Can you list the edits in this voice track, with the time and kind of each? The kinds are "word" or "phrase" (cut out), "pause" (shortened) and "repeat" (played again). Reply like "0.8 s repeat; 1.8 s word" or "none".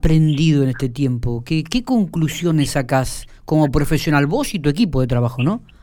none